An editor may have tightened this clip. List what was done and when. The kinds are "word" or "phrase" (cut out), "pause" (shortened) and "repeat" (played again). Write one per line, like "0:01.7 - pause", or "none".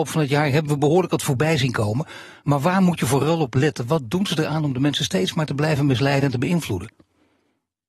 none